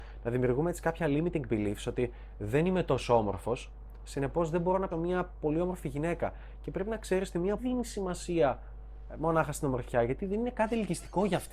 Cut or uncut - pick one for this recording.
cut